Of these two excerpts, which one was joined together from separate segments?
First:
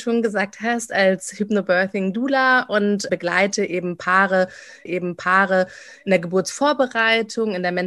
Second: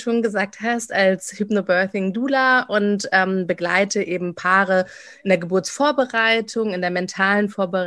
first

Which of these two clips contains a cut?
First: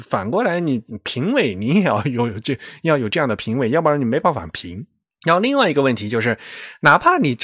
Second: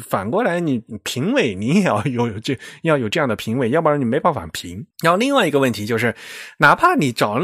second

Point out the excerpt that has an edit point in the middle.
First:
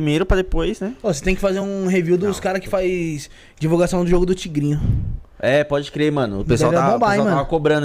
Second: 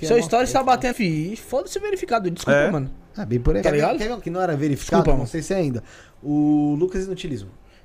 second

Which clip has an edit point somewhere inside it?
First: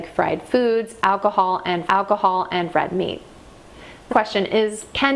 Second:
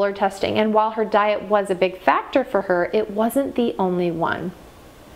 first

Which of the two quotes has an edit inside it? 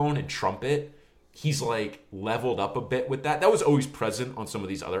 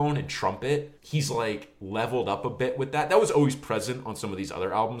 second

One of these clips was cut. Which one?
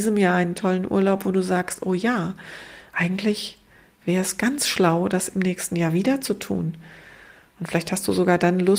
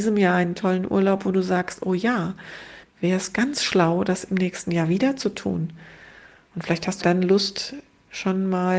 second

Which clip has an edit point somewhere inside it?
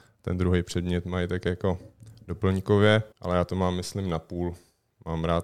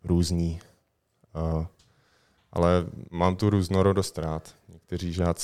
first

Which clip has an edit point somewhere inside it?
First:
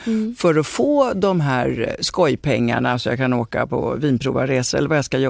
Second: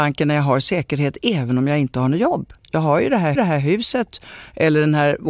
second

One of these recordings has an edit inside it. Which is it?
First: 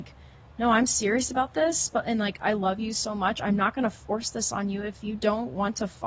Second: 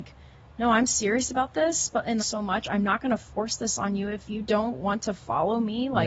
second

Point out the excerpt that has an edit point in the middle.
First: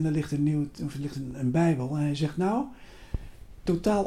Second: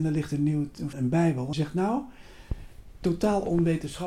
second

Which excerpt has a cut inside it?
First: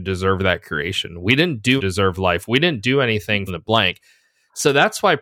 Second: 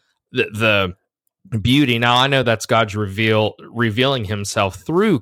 first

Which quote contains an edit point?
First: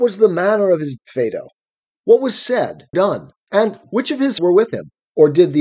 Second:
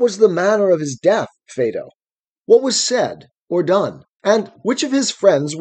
first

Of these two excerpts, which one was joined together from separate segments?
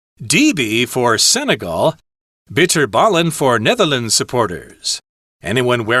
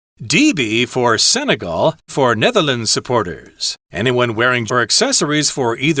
second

